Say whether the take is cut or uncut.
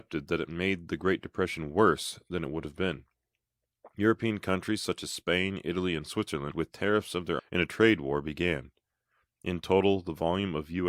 cut